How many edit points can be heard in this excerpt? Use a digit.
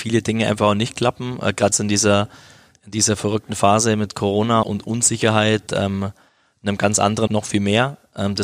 4